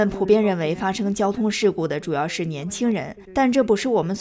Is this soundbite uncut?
no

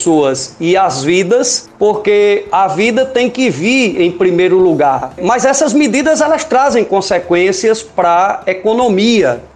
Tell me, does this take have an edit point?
no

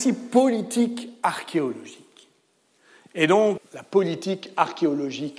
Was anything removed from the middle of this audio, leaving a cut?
yes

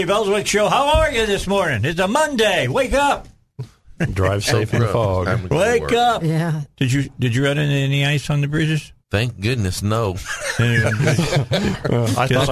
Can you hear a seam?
yes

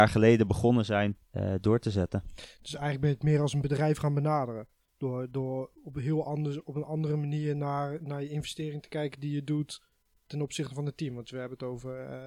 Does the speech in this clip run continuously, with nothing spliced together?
no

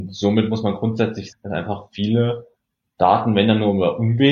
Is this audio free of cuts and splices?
no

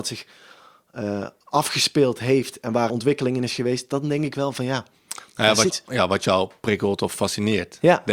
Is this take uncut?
no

